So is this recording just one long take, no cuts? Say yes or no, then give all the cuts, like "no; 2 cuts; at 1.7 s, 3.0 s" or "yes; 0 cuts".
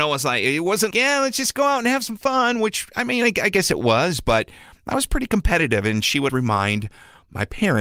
no; 2 cuts; at 0.9 s, 6.3 s